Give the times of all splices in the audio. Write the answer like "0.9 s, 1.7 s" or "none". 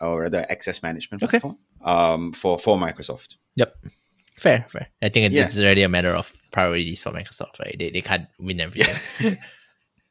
4.9 s